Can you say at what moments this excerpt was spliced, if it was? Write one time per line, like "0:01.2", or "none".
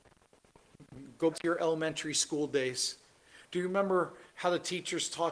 0:01.3
0:04.3